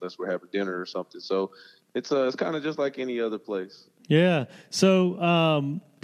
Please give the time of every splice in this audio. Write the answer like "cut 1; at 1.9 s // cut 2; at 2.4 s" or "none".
none